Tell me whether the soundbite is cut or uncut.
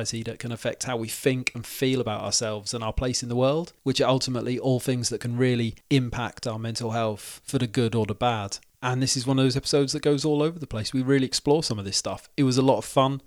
uncut